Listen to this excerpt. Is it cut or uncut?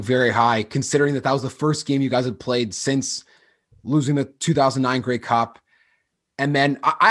uncut